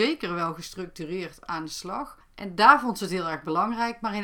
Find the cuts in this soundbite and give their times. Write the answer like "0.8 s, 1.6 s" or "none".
none